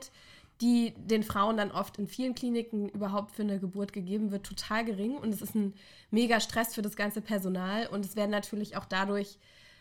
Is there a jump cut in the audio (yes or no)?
no